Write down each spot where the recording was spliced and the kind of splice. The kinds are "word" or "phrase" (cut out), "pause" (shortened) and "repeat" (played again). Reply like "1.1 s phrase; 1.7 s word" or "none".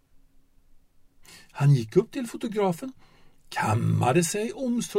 none